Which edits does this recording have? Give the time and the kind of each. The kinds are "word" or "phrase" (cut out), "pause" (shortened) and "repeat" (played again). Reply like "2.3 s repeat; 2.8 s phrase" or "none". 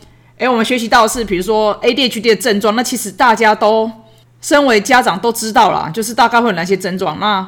none